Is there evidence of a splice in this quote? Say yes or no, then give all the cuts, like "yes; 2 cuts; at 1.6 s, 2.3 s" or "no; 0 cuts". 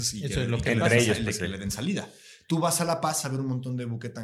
yes; 1 cut; at 3.2 s